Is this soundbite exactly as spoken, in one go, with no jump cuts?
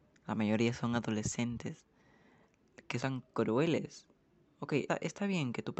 no; 2 cuts; at 3.0 s, 4.9 s

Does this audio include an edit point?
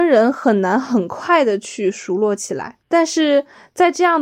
no; 0 cuts

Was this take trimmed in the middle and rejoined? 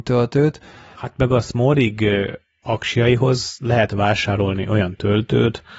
no; 0 cuts

